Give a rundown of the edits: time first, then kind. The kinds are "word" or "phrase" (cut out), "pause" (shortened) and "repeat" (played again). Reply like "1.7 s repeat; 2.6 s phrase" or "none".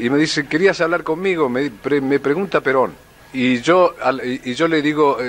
3.2 s pause